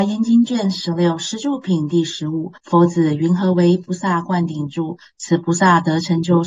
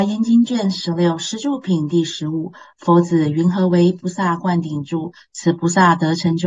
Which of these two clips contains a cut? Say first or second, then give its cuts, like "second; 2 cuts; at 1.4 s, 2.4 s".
first; 1 cut; at 2.6 s